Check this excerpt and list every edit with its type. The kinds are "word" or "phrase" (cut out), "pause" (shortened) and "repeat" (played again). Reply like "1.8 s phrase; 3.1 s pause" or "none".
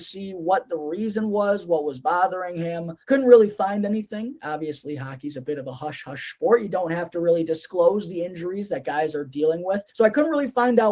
3.0 s pause; 9.9 s pause

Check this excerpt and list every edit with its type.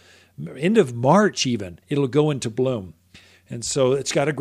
1.8 s pause

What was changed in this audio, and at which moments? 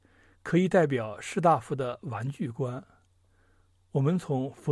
none

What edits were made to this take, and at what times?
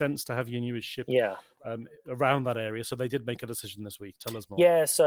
none

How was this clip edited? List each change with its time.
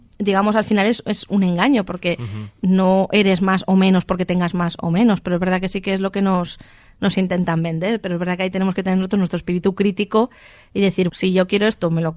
11.1 s word

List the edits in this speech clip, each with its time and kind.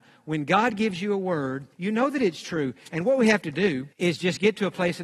1.7 s pause; 3.9 s pause

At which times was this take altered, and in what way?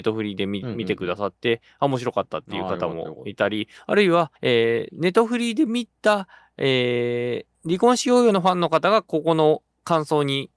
4.4 s pause; 7.5 s pause

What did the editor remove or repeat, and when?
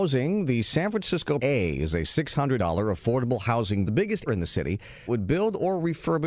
1.4 s word; 2.6 s word; 3.9 s word; 4.3 s word; 5.1 s word

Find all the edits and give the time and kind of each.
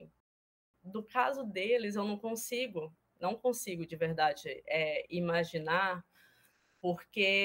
none

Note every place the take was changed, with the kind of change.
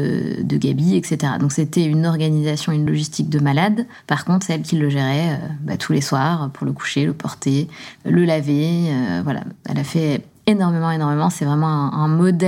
none

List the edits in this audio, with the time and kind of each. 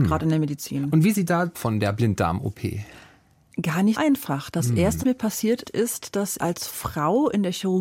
1.1 s word; 1.5 s word; 3.9 s word; 5.0 s word; 5.6 s word; 6.4 s word

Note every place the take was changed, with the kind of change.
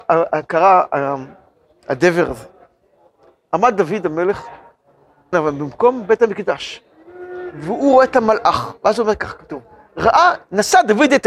5.3 s word

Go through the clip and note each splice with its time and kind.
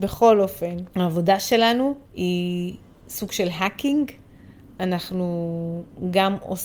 0.9 s pause; 2.0 s pause

